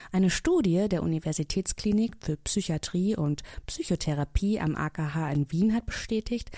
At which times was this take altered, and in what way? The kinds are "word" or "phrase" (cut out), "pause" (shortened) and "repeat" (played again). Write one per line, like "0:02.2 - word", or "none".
none